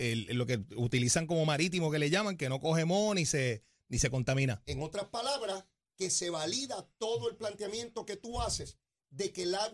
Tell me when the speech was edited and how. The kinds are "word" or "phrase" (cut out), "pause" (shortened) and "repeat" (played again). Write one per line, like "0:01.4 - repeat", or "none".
none